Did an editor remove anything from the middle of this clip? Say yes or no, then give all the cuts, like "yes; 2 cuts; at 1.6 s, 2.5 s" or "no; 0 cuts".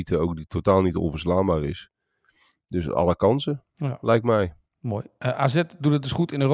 no; 0 cuts